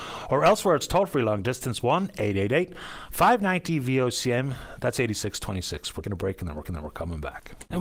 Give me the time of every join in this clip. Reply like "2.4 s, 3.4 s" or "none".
6.0 s, 6.6 s